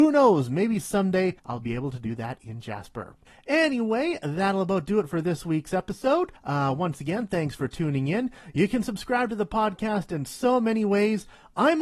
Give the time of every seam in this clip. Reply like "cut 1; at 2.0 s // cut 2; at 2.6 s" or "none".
cut 1; at 1.4 s // cut 2; at 3.3 s // cut 3; at 6.4 s